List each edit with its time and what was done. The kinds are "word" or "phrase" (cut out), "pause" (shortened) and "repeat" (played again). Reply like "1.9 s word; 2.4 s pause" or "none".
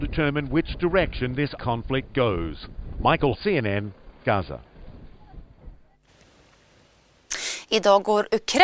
1.6 s word; 3.3 s word